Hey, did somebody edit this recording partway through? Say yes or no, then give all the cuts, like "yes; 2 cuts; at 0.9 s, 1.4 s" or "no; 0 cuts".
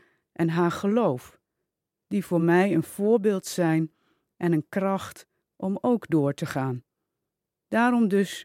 no; 0 cuts